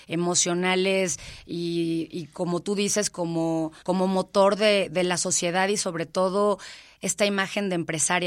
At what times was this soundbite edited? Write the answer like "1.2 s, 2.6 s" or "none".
3.8 s